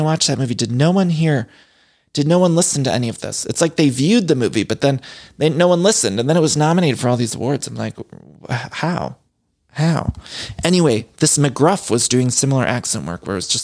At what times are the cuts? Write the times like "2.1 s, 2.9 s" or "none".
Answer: none